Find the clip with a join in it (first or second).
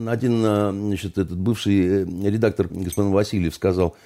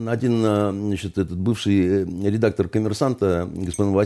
first